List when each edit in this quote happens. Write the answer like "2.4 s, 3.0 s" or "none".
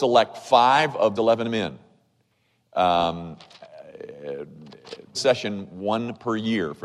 1.2 s, 5.1 s